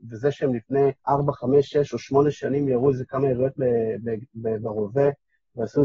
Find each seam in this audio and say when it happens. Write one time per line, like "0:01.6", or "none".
0:01.0